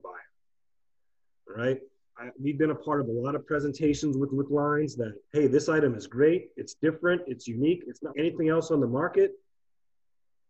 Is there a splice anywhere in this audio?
yes; 3 cuts; at 4.3 s, 5.2 s, 8.1 s

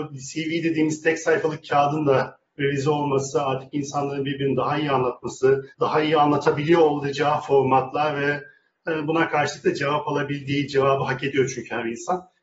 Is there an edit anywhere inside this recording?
yes; 1 cut; at 5.7 s

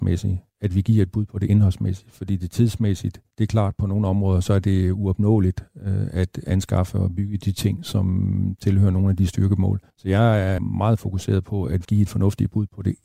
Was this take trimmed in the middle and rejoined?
yes; 4 cuts; at 3.3 s, 9.9 s, 10.6 s, 11.8 s

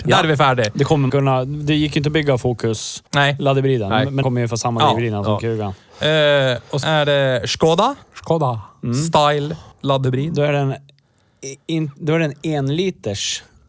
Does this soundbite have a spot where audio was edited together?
yes; 6 cuts; at 1.1 s, 3.1 s, 4.2 s, 6.8 s, 8.0 s, 9.7 s

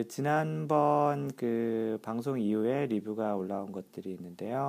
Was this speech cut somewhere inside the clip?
no; 0 cuts

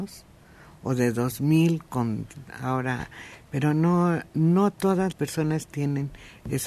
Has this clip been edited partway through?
yes; 1 cut; at 5.1 s

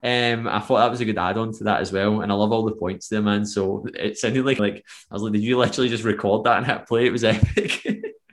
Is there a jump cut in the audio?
yes; 1 cut; at 4.6 s

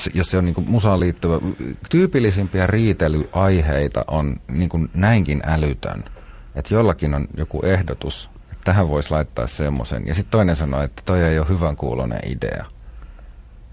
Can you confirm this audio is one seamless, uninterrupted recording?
yes; 0 cuts

